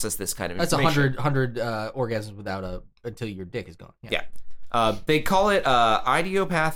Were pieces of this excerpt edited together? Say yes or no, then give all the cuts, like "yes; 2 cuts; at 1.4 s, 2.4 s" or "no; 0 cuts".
yes; 1 cut; at 2.9 s